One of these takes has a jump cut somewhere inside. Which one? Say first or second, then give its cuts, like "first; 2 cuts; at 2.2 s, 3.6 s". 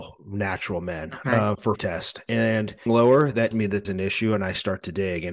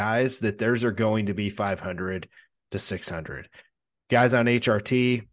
first; 4 cuts; at 1.8 s, 2.9 s, 3.5 s, 3.8 s